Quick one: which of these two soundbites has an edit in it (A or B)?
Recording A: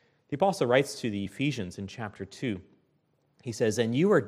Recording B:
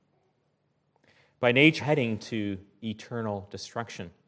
B